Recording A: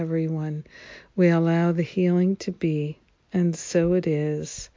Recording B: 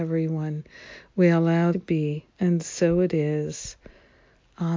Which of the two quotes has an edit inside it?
B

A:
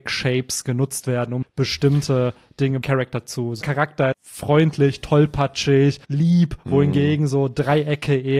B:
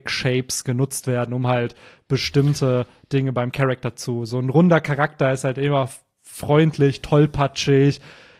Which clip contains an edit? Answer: A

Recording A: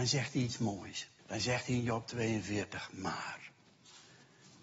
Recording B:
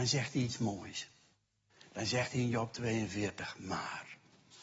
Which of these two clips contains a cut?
A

